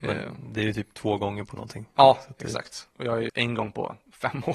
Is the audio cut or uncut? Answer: cut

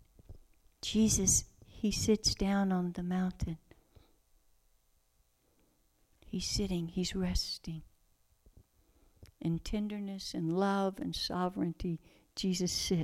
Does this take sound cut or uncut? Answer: uncut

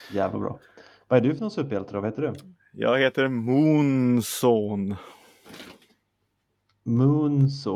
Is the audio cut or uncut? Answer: uncut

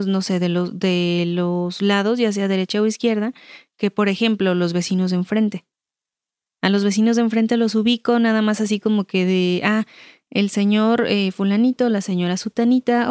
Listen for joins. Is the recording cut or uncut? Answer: uncut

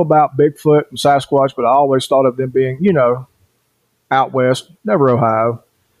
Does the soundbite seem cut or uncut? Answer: uncut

